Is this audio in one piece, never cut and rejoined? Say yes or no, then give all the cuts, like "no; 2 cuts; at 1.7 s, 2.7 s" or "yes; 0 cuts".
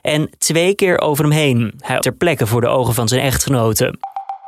no; 1 cut; at 2.0 s